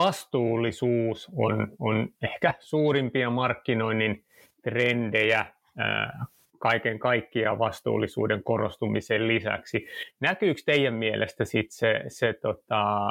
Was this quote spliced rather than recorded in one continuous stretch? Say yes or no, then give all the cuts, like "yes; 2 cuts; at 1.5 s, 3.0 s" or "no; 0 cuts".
no; 0 cuts